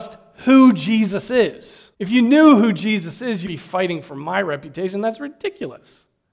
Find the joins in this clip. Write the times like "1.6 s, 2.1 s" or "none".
1.9 s, 3.5 s